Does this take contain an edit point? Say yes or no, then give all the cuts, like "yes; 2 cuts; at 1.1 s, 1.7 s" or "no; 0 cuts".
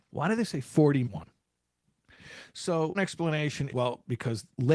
yes; 3 cuts; at 1.0 s, 2.9 s, 3.7 s